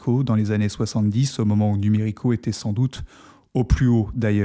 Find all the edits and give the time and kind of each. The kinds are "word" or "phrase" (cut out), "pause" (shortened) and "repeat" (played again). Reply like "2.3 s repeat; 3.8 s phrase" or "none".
none